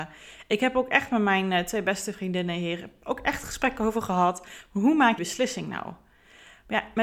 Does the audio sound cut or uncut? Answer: cut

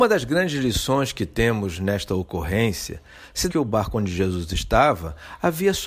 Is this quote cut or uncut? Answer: cut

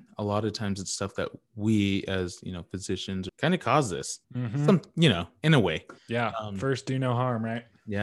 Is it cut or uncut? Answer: cut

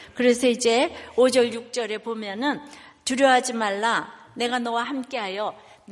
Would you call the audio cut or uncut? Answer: uncut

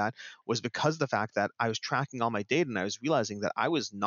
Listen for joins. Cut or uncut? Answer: uncut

